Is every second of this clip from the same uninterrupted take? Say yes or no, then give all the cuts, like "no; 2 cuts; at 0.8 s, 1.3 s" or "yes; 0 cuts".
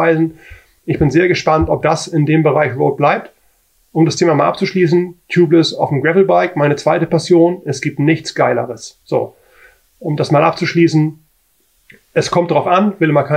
yes; 0 cuts